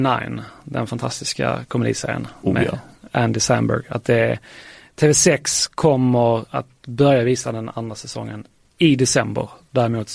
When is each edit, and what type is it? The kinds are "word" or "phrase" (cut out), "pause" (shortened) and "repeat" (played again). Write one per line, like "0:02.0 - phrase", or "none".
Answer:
none